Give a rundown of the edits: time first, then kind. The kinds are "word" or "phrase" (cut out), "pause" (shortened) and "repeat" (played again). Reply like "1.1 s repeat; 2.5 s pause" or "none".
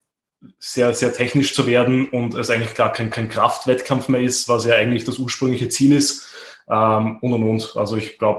3.1 s repeat